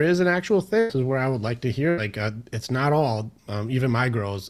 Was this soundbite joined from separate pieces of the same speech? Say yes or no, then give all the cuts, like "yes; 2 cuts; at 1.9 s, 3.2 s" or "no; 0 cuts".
no; 0 cuts